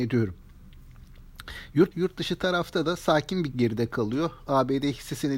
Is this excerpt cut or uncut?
cut